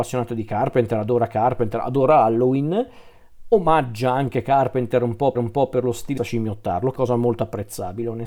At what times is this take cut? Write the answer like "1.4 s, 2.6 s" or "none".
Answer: 5.3 s, 6.2 s, 6.9 s